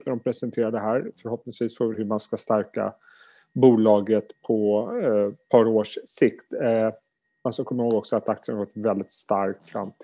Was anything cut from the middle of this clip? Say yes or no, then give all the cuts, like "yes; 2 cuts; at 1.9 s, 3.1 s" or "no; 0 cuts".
yes; 1 cut; at 1.9 s